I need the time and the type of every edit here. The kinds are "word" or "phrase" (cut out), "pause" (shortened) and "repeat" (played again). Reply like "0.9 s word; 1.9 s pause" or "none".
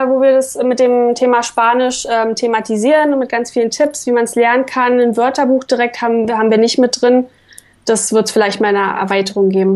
none